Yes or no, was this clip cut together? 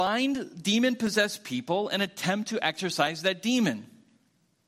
no